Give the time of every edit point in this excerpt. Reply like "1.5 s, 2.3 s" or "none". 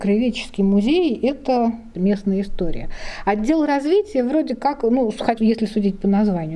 5.4 s